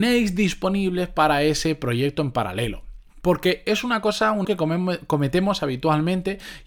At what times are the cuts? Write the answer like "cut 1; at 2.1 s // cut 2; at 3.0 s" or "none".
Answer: cut 1; at 4.4 s